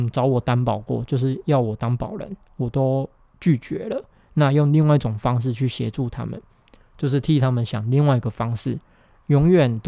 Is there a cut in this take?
no; 0 cuts

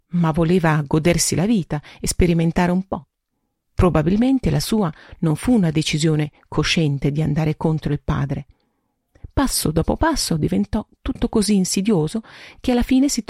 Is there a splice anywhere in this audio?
no; 0 cuts

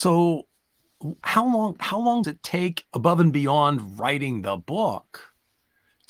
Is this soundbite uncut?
no; 3 cuts; at 1.2 s, 2.2 s, 2.9 s

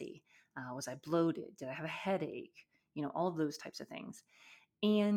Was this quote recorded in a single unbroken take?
yes; 0 cuts

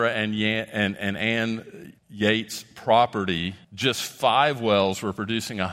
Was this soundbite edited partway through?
yes; 2 cuts; at 2.0 s, 3.6 s

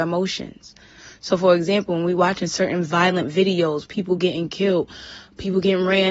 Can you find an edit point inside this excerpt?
no; 0 cuts

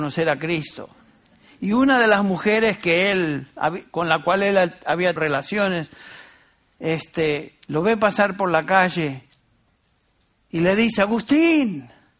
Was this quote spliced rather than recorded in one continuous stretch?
yes; 1 cut; at 5.2 s

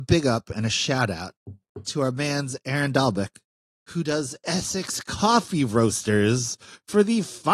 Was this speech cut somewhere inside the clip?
no; 0 cuts

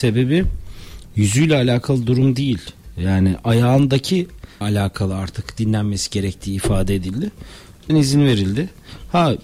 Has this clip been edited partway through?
yes; 2 cuts; at 4.6 s, 7.9 s

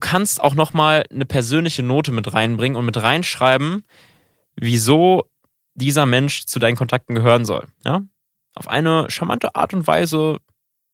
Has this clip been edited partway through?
no; 0 cuts

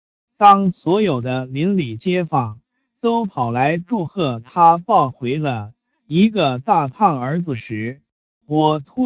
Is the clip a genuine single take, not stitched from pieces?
yes; 0 cuts

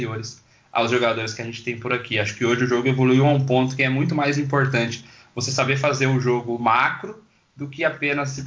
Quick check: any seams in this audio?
no; 0 cuts

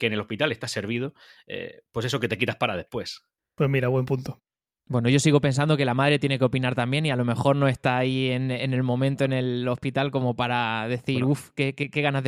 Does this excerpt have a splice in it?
no; 0 cuts

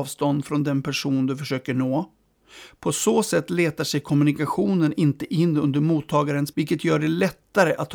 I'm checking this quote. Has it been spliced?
yes; 1 cut; at 6.5 s

